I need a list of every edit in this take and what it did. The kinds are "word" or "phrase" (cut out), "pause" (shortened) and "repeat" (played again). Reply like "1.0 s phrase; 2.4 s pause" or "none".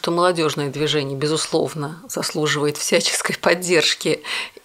none